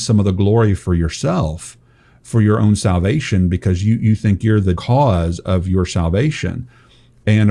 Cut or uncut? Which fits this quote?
cut